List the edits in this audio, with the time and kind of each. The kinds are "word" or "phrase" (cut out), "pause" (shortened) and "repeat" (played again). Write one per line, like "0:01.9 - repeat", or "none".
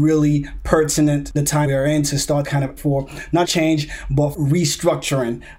0:01.4 - word
0:01.7 - word
0:02.4 - word
0:02.8 - word
0:03.4 - word
0:04.3 - word